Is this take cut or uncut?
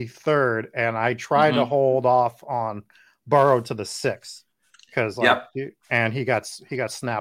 uncut